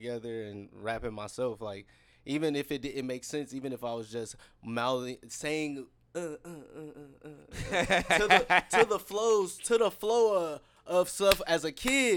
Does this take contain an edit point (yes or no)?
no